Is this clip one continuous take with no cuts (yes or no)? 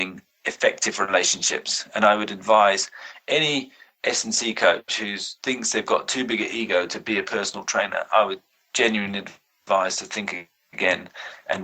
yes